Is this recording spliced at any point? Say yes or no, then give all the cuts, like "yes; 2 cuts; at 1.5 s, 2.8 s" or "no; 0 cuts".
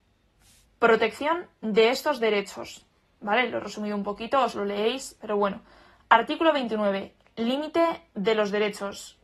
no; 0 cuts